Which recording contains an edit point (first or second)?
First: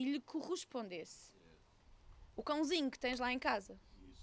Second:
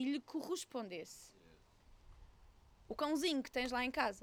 first